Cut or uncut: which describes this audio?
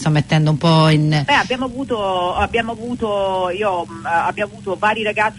uncut